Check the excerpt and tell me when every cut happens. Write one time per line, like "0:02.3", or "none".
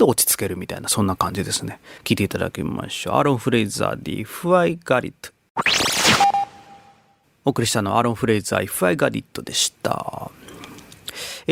0:02.0